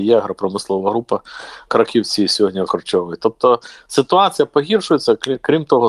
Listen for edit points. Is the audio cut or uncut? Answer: cut